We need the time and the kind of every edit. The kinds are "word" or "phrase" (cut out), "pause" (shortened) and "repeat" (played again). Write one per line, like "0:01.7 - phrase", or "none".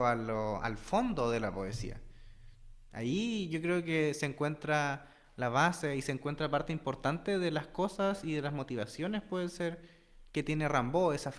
none